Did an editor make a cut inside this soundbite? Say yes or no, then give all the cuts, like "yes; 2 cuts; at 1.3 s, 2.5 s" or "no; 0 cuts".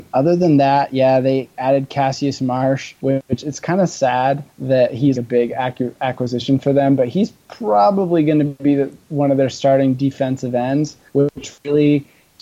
yes; 4 cuts; at 3.0 s, 4.5 s, 5.1 s, 11.1 s